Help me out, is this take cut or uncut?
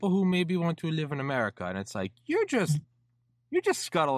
uncut